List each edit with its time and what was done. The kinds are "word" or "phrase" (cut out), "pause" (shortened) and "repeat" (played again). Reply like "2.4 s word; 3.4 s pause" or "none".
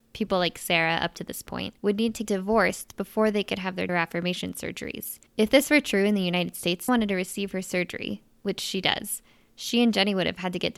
1.8 s pause; 2.3 s word; 3.9 s word; 5.3 s pause; 6.9 s phrase